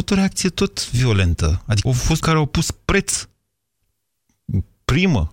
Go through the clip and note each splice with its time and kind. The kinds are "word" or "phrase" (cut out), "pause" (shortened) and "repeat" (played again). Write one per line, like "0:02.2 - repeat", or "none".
0:01.9 - word
0:02.2 - word